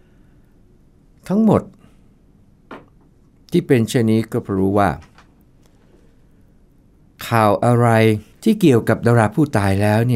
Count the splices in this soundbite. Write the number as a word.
one